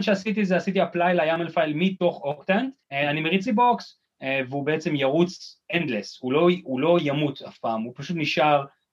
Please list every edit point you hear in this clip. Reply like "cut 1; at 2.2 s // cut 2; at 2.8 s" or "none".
cut 1; at 2.8 s // cut 2; at 3.5 s